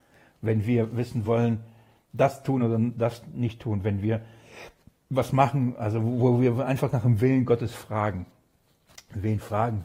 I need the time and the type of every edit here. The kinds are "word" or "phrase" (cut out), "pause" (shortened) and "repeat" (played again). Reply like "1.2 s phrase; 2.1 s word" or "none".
none